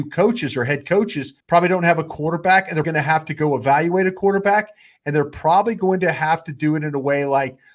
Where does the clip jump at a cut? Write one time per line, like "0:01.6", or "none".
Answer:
0:01.4
0:02.8